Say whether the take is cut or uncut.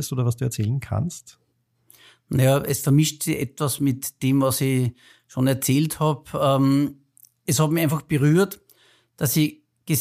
uncut